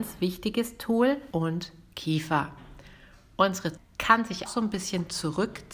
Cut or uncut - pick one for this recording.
cut